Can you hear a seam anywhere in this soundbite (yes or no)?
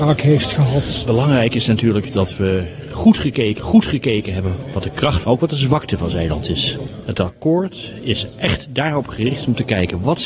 yes